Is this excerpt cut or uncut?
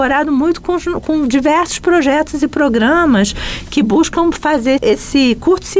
cut